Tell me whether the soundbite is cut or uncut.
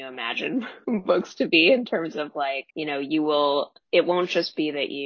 cut